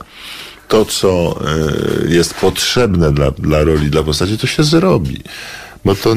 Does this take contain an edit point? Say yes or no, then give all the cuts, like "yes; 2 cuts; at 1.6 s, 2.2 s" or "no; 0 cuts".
no; 0 cuts